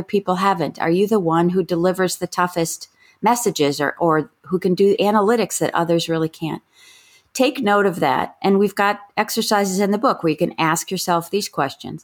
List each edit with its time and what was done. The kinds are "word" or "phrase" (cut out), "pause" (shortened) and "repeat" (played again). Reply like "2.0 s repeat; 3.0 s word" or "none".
none